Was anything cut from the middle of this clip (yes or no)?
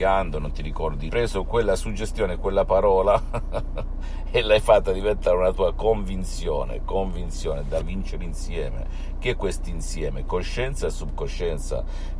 yes